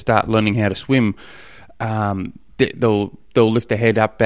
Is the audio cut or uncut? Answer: uncut